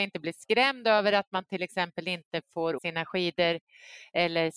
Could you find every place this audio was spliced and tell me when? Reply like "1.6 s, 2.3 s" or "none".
2.8 s